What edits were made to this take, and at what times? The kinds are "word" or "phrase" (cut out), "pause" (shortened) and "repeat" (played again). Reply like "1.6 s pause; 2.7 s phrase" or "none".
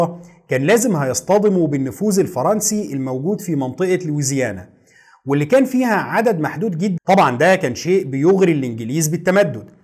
7.0 s phrase